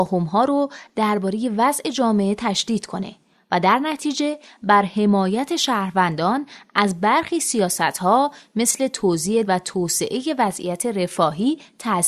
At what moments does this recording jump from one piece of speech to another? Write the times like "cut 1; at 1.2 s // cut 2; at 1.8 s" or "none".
cut 1; at 9.4 s